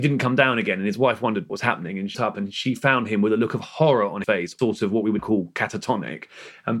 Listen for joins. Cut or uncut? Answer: cut